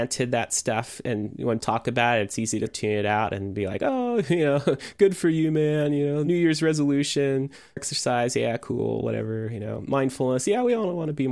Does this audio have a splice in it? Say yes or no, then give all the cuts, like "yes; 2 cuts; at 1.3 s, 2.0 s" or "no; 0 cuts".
yes; 3 cuts; at 1.6 s, 2.7 s, 7.8 s